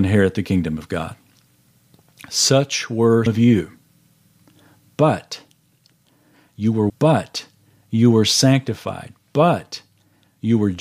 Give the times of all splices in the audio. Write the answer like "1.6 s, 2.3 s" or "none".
3.3 s, 6.9 s